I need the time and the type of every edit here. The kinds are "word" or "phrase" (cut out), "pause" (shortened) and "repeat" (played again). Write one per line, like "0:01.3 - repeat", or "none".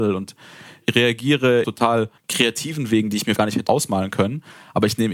0:01.6 - phrase
0:02.2 - pause
0:03.4 - word
0:03.7 - word